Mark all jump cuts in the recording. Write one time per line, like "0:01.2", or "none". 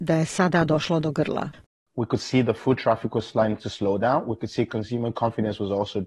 none